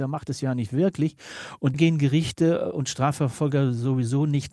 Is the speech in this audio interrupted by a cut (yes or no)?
yes